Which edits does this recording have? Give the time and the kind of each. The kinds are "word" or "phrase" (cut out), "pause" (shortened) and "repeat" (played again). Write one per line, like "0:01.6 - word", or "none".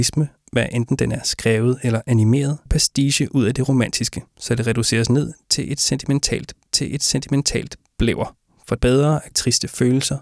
0:02.7 - word
0:04.3 - pause
0:06.7 - repeat
0:08.8 - word
0:09.3 - phrase